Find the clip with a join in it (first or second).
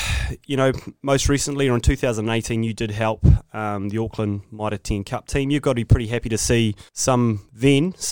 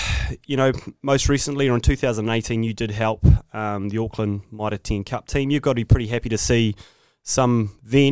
first